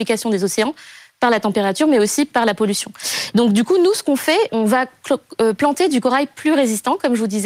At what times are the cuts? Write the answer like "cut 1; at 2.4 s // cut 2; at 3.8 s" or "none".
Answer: cut 1; at 4.5 s

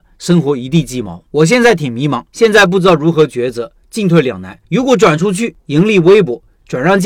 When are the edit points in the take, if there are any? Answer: cut 1; at 1.3 s // cut 2; at 2.3 s // cut 3; at 4.6 s // cut 4; at 5.6 s

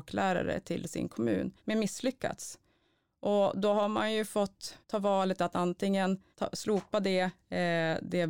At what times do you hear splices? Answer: cut 1; at 1.6 s // cut 2; at 4.8 s // cut 3; at 6.3 s

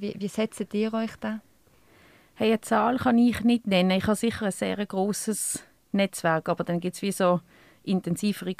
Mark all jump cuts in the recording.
none

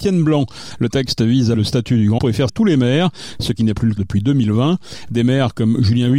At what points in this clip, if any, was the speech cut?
cut 1; at 1.5 s // cut 2; at 2.2 s // cut 3; at 2.5 s // cut 4; at 4.0 s

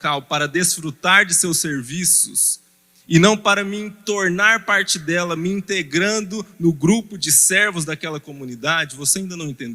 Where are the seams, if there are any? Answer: none

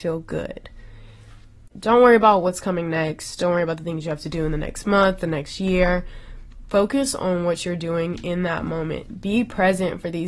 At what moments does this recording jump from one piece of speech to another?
cut 1; at 1.7 s

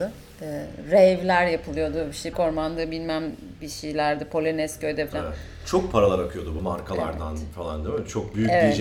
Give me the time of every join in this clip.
cut 1; at 2.3 s // cut 2; at 5.1 s // cut 3; at 5.9 s // cut 4; at 6.6 s

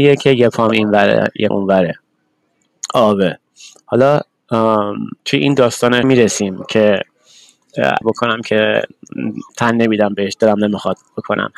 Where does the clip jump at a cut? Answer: cut 1; at 1.5 s // cut 2; at 5.2 s // cut 3; at 6.0 s // cut 4; at 8.0 s // cut 5; at 9.5 s

